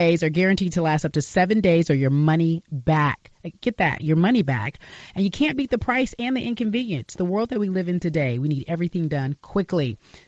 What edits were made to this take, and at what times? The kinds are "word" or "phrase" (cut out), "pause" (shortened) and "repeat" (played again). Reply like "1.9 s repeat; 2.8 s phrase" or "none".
none